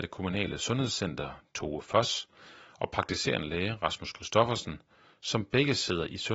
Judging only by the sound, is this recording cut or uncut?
uncut